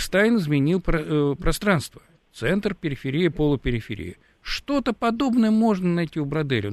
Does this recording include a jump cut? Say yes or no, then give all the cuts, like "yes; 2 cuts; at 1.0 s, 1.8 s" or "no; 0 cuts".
no; 0 cuts